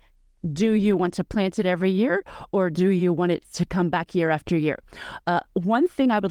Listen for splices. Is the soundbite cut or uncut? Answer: uncut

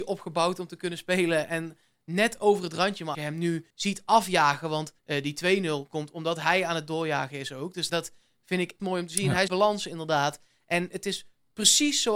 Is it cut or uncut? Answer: cut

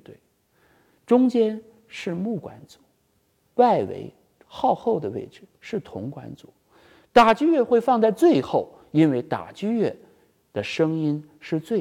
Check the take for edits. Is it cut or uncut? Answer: uncut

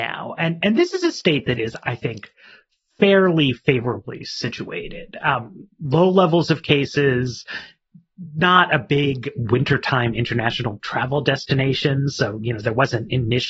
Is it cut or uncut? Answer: uncut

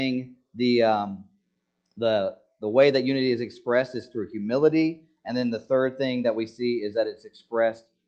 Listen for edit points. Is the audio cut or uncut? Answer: uncut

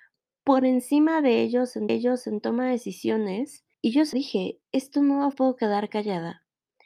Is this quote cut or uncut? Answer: cut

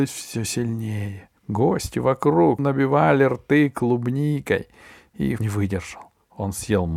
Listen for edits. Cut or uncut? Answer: cut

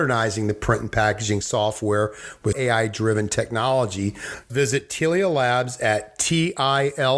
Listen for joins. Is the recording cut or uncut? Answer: cut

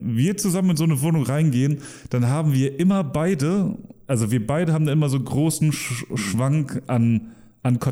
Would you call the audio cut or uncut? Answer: uncut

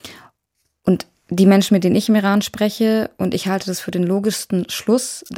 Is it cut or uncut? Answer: uncut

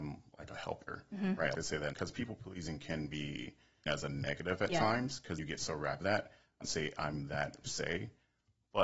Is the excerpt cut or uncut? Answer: cut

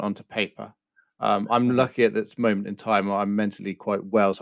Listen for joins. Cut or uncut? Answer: uncut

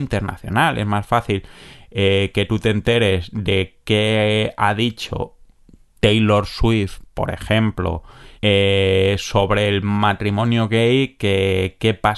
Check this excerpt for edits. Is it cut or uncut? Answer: cut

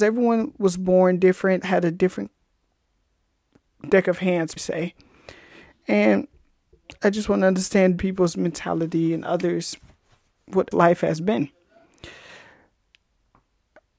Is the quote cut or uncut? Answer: cut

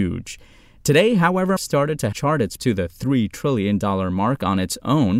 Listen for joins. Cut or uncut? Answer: cut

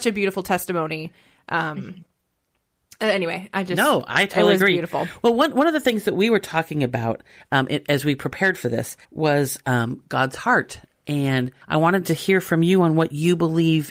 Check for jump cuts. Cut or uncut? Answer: cut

